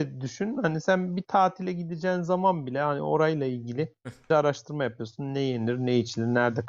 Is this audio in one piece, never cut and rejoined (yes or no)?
no